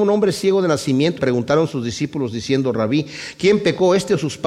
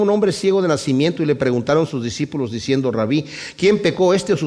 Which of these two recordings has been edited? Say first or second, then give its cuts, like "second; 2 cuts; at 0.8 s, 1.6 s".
first; 1 cut; at 1.2 s